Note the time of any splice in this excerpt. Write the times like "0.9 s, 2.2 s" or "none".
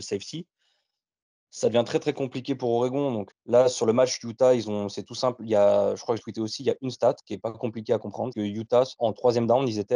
3.3 s, 6.2 s, 6.9 s, 8.3 s